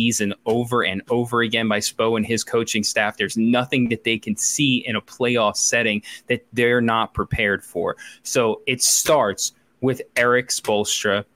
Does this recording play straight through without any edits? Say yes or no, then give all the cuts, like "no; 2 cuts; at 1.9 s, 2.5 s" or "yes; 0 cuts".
yes; 0 cuts